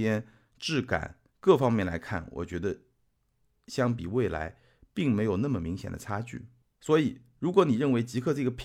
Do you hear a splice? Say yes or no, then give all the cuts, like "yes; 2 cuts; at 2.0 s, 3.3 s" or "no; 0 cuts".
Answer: yes; 1 cut; at 1.3 s